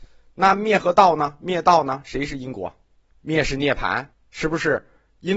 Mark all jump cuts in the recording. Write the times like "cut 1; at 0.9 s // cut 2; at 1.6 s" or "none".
cut 1; at 3.0 s // cut 2; at 4.1 s